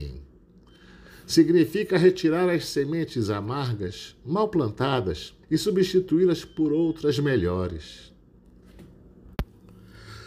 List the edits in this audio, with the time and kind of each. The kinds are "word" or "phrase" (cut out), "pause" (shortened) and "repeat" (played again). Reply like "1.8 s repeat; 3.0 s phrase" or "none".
5.4 s pause